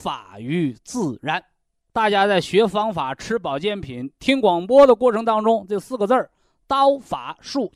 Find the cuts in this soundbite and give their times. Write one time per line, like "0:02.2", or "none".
0:01.7